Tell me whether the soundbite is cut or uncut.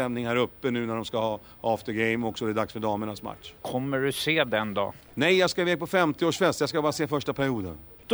uncut